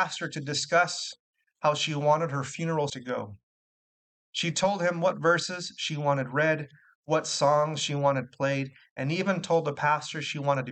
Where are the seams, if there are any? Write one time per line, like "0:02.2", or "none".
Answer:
0:02.9